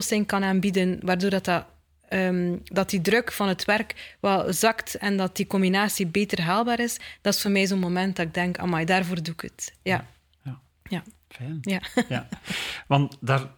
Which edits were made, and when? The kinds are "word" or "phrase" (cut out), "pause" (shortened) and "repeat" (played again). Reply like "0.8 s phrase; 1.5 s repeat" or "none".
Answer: none